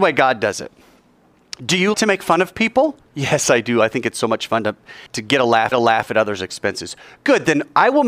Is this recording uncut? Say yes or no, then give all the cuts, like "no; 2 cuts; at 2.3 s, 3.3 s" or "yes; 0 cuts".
no; 3 cuts; at 1.9 s, 5.1 s, 5.7 s